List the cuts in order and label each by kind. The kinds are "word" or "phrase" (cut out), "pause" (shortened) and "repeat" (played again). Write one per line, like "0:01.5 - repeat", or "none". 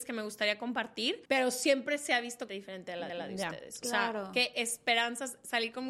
0:01.2 - pause
0:02.5 - word
0:03.1 - repeat